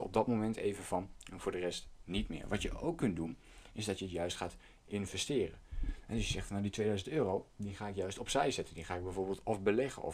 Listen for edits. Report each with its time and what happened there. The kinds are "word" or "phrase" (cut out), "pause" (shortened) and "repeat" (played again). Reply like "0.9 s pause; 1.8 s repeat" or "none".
none